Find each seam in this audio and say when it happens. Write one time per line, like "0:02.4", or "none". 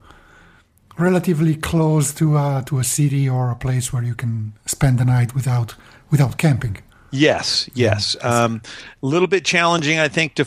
0:04.6
0:06.9
0:09.0